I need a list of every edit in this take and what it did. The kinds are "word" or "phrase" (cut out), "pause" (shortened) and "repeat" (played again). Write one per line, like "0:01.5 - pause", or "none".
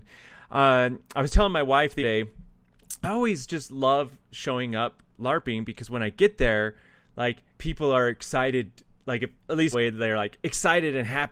0:02.0 - word
0:03.0 - phrase
0:05.1 - word
0:07.5 - pause
0:09.4 - pause
0:09.7 - phrase